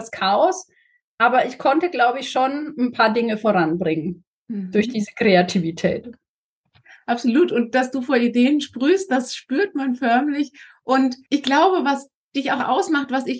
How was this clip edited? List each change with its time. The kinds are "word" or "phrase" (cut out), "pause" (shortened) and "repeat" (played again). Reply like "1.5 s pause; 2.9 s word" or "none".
none